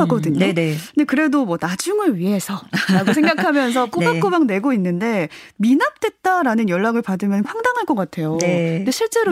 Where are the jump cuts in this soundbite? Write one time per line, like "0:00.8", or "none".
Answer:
0:07.4